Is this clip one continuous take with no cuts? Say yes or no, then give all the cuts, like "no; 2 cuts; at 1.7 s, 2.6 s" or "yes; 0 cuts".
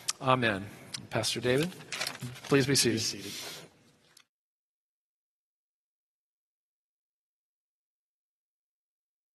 yes; 0 cuts